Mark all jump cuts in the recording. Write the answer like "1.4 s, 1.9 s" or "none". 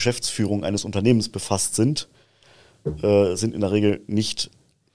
none